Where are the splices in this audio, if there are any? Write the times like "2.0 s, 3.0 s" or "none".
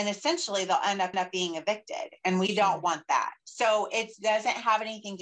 1.1 s, 3.4 s